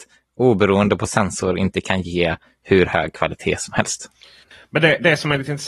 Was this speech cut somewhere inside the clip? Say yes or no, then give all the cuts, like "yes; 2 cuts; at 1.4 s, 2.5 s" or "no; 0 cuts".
no; 0 cuts